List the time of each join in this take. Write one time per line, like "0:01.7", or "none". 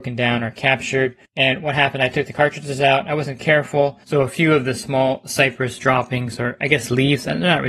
0:01.2